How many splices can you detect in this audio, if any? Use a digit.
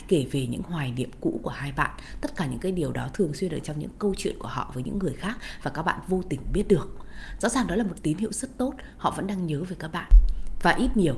0